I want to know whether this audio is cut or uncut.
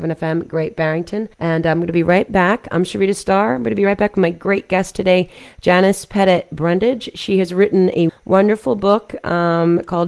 cut